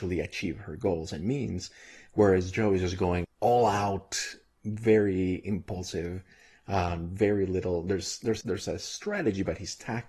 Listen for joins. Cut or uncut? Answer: cut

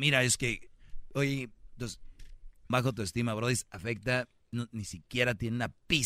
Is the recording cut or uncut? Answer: cut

